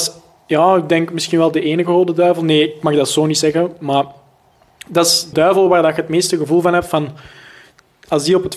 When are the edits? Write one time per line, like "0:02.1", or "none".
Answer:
0:05.3